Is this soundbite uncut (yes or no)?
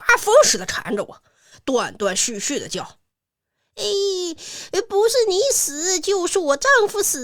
yes